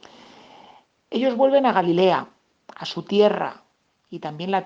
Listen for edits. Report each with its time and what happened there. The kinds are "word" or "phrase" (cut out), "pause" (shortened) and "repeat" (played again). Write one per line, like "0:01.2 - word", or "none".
none

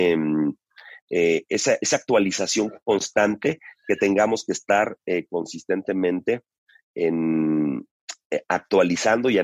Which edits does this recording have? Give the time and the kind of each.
none

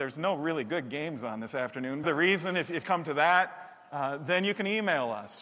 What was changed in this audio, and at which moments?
0:02.0 - phrase
0:02.8 - phrase

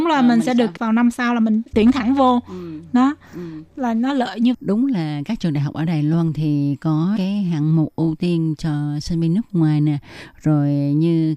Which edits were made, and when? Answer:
0:04.5 - word
0:07.2 - word

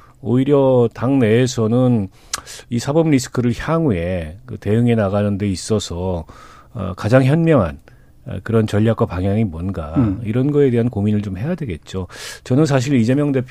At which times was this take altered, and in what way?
none

